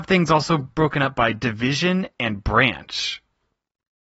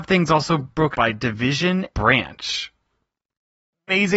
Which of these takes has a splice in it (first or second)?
second